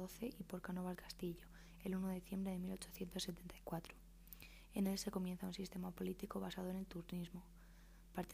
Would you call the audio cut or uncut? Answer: cut